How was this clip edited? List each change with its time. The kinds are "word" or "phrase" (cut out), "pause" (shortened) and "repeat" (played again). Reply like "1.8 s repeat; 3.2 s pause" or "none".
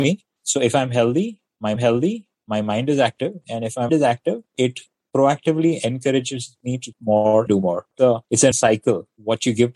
1.8 s repeat; 3.9 s word; 4.5 s pause; 6.9 s word; 7.5 s word; 8.5 s word